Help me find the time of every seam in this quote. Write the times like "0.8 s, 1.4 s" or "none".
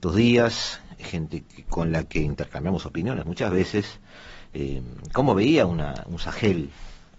none